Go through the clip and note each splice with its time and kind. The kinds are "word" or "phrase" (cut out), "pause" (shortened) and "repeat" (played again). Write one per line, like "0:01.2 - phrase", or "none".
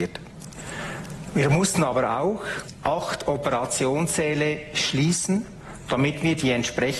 none